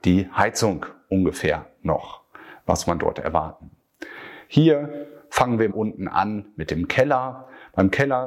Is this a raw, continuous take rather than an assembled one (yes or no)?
no